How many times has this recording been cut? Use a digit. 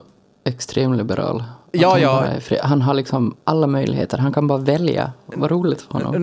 0